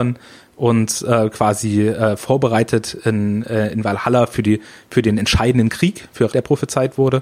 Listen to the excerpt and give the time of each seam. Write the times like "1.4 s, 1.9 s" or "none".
6.3 s

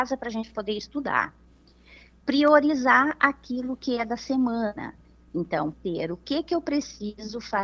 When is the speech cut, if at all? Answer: 5.7 s

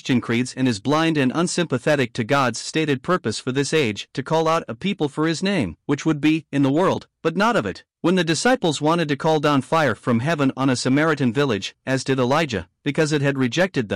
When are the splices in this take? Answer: 5.8 s, 7.9 s

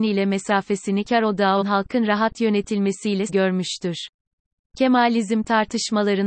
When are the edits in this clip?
1.0 s, 1.6 s, 3.3 s

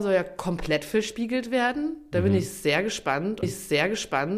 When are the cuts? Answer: 3.4 s

